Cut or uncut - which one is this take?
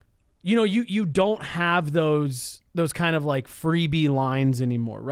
cut